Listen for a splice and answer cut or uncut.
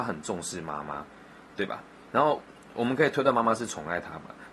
uncut